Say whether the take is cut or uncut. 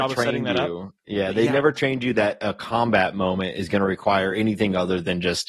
uncut